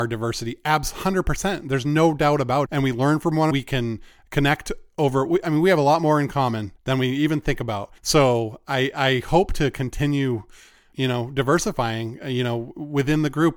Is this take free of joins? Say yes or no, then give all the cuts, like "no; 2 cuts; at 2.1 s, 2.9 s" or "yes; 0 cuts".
no; 5 cuts; at 2.7 s, 3.5 s, 6.8 s, 8.0 s, 10.9 s